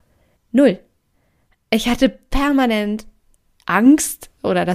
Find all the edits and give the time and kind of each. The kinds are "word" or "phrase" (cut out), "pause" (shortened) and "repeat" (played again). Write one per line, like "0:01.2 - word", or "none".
none